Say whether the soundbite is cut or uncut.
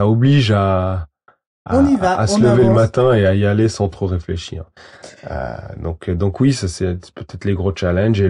uncut